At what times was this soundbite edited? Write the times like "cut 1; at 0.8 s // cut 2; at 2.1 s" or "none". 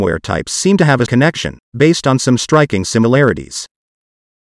cut 1; at 1.1 s